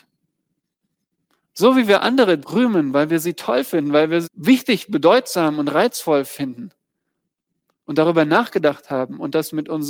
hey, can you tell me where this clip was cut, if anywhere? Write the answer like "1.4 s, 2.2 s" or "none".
2.4 s, 4.2 s